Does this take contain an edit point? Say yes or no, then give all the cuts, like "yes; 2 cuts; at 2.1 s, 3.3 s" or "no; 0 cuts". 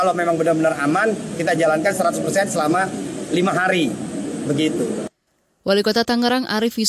no; 0 cuts